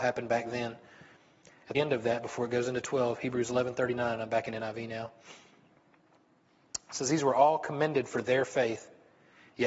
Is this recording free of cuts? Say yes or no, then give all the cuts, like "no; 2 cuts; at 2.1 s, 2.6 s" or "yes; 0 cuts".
no; 1 cut; at 1.7 s